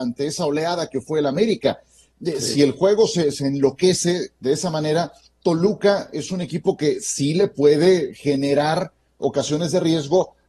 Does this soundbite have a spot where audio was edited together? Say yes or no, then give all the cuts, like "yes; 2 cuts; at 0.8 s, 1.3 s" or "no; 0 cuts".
no; 0 cuts